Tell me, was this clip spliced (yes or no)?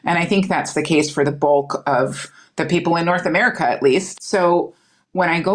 no